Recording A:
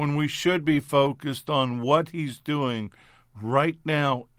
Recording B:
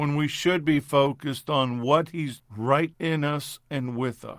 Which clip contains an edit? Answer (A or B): B